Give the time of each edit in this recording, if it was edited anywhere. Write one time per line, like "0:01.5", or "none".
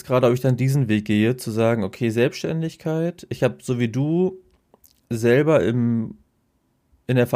none